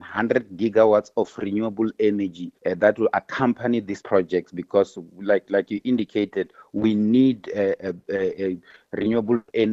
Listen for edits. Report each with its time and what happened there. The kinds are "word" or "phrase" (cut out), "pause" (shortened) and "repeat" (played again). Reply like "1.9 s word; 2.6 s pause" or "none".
2.6 s pause